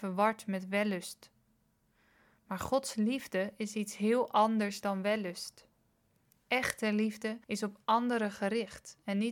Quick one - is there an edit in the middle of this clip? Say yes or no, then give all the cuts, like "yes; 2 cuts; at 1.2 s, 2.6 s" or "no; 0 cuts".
yes; 1 cut; at 7.4 s